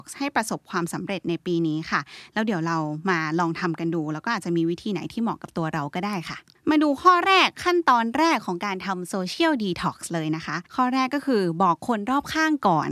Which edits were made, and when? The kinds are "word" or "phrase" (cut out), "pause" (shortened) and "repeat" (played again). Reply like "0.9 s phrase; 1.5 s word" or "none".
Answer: 10.7 s pause